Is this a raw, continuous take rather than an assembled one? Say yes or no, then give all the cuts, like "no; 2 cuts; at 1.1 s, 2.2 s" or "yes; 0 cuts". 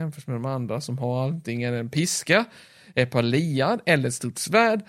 yes; 0 cuts